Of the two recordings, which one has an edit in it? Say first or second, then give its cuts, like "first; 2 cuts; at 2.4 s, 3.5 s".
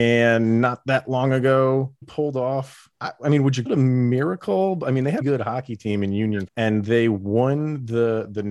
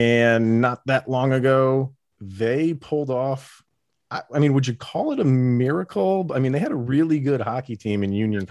first; 5 cuts; at 2.0 s, 2.9 s, 3.7 s, 5.2 s, 6.5 s